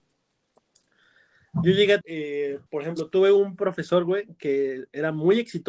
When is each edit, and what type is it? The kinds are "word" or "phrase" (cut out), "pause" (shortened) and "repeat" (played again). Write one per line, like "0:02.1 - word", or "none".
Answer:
0:02.0 - word
0:02.7 - pause